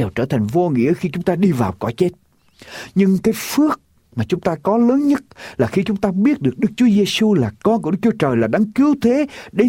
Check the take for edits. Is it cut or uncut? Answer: uncut